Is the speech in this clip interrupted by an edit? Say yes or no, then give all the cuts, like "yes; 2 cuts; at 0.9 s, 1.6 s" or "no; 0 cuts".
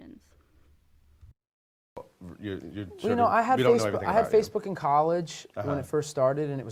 no; 0 cuts